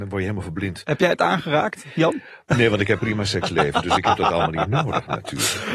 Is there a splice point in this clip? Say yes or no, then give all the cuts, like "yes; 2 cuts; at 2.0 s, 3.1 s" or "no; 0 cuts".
yes; 1 cut; at 3.0 s